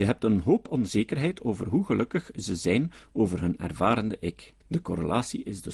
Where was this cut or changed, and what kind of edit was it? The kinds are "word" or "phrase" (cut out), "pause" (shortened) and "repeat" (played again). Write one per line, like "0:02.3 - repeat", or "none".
0:04.6 - pause